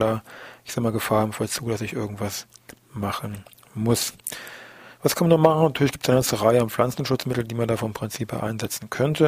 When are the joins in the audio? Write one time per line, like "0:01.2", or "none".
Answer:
none